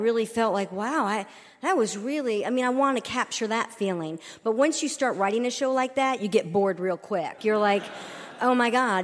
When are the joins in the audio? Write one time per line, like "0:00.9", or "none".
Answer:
0:07.4